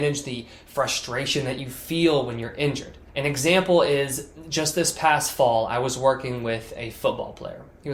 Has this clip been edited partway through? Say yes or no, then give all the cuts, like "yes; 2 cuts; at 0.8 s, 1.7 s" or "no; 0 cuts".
yes; 1 cut; at 3.1 s